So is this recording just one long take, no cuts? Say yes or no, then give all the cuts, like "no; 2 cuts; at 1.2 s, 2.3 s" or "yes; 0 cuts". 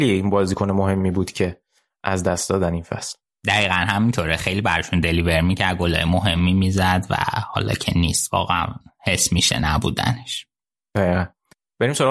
yes; 0 cuts